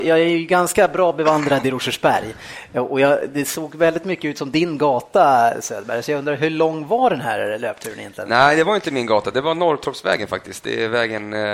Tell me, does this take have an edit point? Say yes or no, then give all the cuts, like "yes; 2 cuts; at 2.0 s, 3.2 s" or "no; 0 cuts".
no; 0 cuts